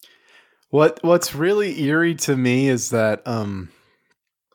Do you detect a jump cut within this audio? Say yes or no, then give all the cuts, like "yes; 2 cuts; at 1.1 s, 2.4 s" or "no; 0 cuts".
no; 0 cuts